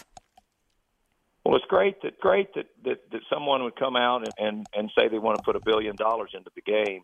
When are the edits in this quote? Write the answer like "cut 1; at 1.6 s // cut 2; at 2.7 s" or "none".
cut 1; at 2.2 s // cut 2; at 4.3 s